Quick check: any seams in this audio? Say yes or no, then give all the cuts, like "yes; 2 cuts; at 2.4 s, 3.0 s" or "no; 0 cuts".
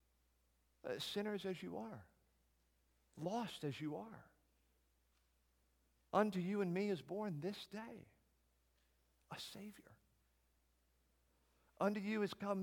no; 0 cuts